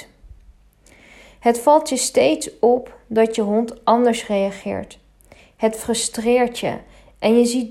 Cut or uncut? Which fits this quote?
uncut